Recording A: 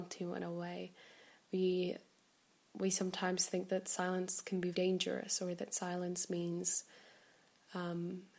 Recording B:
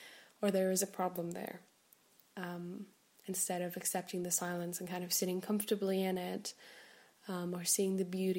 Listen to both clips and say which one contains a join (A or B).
A